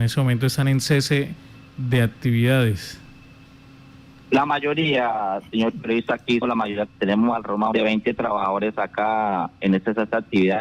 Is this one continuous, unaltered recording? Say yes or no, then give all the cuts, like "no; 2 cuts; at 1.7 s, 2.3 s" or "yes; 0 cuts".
no; 3 cuts; at 6.4 s, 6.9 s, 7.7 s